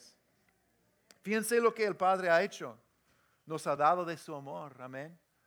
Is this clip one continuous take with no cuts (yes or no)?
yes